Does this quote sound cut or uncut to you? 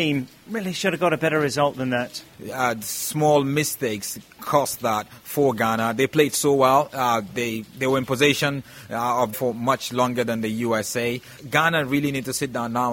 cut